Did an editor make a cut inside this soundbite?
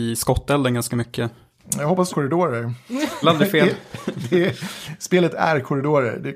yes; 2 cuts; at 2.1 s, 3.2 s

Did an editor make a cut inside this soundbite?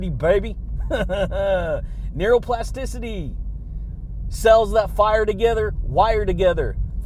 no; 0 cuts

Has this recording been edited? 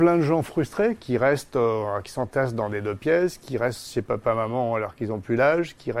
no; 0 cuts

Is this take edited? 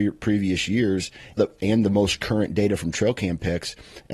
yes; 1 cut; at 1.4 s

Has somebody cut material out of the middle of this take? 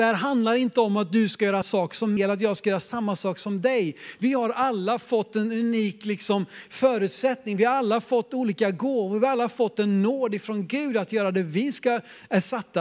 yes; 2 cuts; at 1.6 s, 2.2 s

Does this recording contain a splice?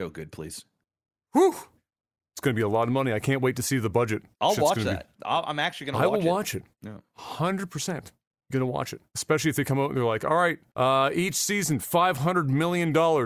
yes; 5 cuts; at 4.3 s, 6.7 s, 8.3 s, 9.1 s, 10.7 s

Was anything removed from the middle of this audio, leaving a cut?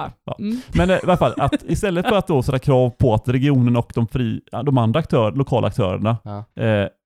no; 0 cuts

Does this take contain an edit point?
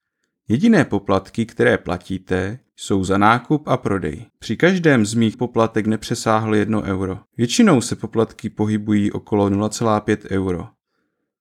yes; 4 cuts; at 2.7 s, 4.3 s, 5.3 s, 7.3 s

